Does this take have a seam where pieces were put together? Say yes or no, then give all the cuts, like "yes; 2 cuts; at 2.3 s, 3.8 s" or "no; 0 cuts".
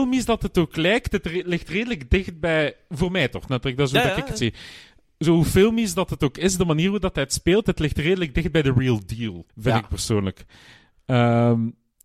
yes; 1 cut; at 9.5 s